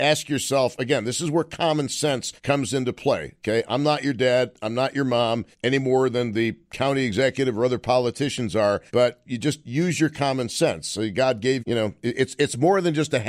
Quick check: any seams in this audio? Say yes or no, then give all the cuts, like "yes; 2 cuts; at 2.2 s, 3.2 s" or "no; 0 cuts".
yes; 4 cuts; at 2.4 s, 5.5 s, 8.9 s, 11.6 s